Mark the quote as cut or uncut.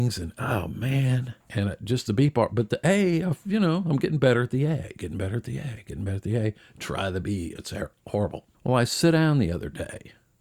cut